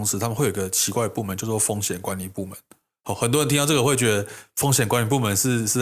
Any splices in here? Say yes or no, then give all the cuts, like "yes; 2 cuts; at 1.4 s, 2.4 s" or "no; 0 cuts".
no; 0 cuts